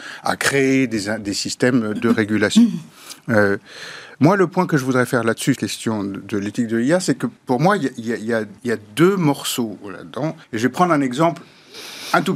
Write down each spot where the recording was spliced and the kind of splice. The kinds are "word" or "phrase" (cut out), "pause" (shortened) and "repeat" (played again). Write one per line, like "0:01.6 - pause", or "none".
0:02.0 - word
0:05.6 - phrase
0:07.4 - pause
0:08.6 - pause
0:10.4 - pause